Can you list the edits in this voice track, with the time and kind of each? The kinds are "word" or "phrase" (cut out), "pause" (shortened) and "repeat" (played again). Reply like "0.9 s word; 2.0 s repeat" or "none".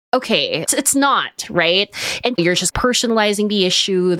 2.4 s phrase

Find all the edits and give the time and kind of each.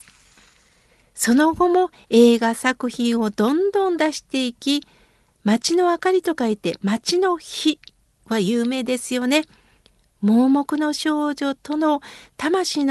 none

